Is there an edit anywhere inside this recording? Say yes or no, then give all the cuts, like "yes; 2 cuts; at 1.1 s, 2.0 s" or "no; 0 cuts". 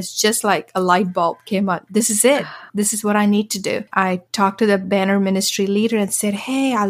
yes; 2 cuts; at 2.7 s, 3.9 s